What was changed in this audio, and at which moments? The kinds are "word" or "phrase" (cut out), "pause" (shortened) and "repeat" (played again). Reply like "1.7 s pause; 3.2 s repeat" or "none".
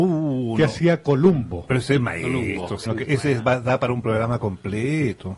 2.9 s word